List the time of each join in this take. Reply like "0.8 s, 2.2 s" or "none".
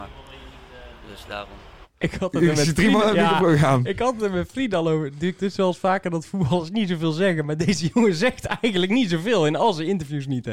1.9 s